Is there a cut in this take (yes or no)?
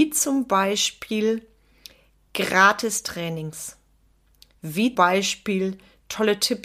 yes